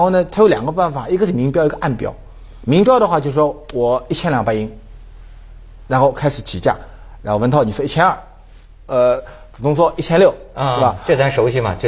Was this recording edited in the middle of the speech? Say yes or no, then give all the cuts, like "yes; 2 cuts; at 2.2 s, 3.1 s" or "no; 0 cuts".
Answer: no; 0 cuts